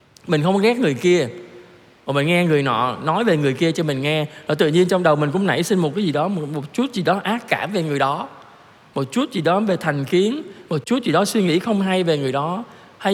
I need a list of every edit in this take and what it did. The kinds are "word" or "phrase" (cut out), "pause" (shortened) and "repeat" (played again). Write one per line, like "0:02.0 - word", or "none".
none